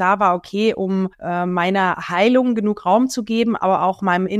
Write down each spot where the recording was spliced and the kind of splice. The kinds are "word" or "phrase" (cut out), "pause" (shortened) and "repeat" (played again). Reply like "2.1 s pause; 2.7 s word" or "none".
1.1 s pause